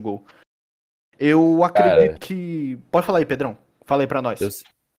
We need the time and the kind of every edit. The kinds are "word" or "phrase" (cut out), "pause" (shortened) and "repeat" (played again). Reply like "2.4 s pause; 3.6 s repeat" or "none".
2.2 s word